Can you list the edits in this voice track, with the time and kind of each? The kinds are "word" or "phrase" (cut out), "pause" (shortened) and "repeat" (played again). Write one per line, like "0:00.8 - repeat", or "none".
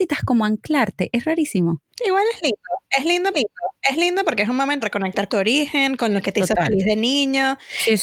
0:01.9 - pause
0:03.3 - repeat
0:04.8 - word
0:05.3 - word

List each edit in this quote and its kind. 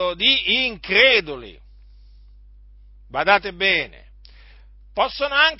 none

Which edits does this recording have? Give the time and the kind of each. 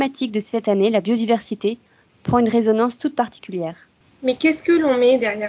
none

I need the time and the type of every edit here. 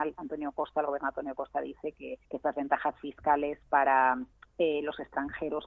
0:02.2 - pause
0:04.3 - pause

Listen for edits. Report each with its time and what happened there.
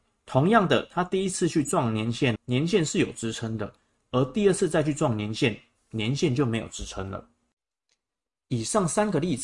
0:02.4 - word

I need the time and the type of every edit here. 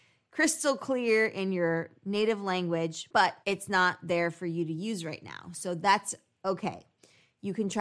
0:03.4 - pause

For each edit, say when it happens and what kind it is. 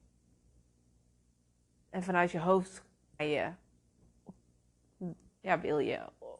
0:03.2 - word

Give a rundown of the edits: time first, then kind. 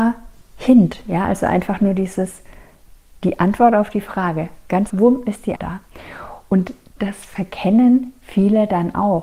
0:04.9 - word
0:05.6 - word

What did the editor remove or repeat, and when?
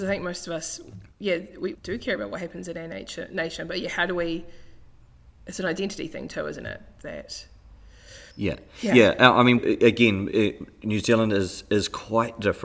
0:01.1 - pause
0:01.7 - word
0:08.3 - pause
0:09.6 - word

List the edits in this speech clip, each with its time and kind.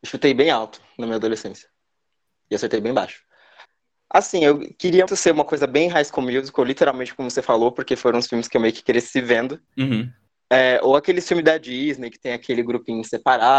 0:05.1 - word

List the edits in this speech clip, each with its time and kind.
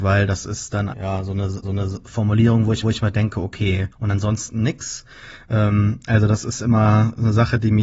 0:00.9 - word
0:01.6 - repeat
0:02.8 - repeat
0:03.9 - pause

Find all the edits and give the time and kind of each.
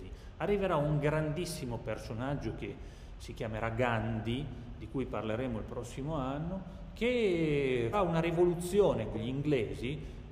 0:07.9 - word
0:09.1 - word

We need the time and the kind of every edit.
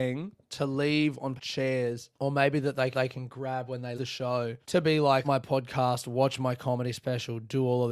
0:01.4 - word
0:02.2 - pause
0:02.9 - repeat
0:04.0 - word
0:04.6 - pause
0:05.2 - phrase

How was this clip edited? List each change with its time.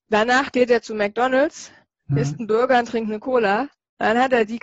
none

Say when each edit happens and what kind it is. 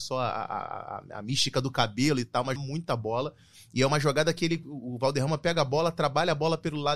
0:02.6 - word

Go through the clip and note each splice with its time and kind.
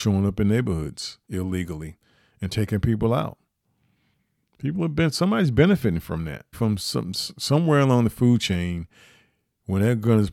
0:01.2 - pause
0:06.5 - word

